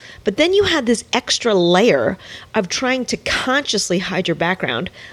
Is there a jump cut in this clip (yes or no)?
no